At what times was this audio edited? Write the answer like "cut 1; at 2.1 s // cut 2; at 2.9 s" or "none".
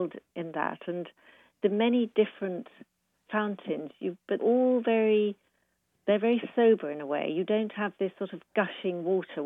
cut 1; at 3.3 s // cut 2; at 4.4 s